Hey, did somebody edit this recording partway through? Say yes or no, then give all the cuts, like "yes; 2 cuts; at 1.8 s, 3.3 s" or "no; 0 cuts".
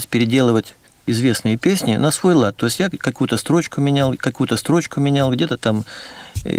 yes; 1 cut; at 4.1 s